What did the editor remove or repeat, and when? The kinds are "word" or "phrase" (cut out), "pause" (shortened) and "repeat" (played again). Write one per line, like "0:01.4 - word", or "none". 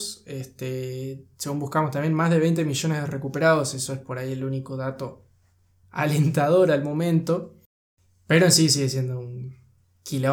none